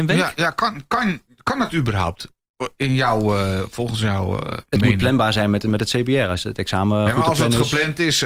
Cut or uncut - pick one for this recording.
uncut